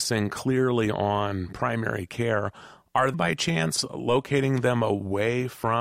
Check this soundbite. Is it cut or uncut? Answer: cut